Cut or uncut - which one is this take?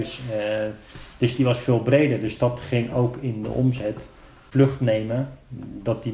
uncut